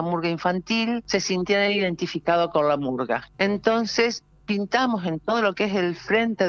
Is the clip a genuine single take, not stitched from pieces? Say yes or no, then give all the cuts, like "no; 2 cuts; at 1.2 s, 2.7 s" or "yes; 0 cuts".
yes; 0 cuts